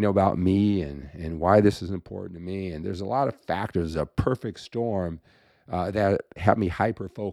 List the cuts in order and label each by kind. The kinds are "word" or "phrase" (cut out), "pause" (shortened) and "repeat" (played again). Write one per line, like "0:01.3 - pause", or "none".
none